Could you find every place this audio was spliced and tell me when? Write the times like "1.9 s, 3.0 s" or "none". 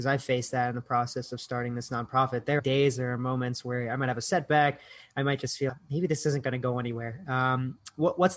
2.6 s, 5.7 s

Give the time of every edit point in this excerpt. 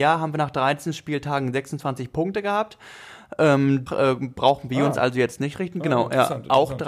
3.9 s

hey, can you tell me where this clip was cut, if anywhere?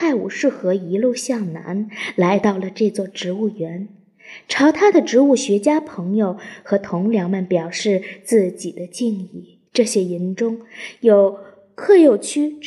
9.7 s

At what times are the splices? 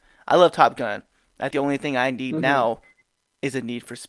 1.5 s

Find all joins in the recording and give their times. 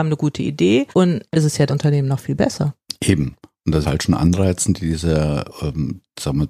0.9 s, 1.3 s, 1.7 s, 3.8 s

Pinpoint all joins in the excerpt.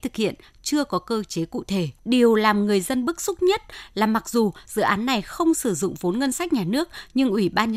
2.0 s

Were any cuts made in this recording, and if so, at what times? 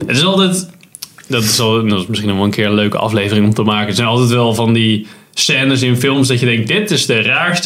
none

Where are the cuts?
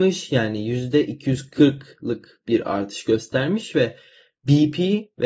none

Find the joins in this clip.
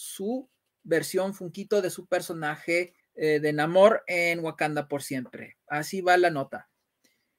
3.0 s

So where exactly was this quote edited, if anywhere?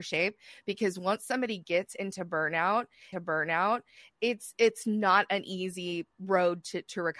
3.1 s

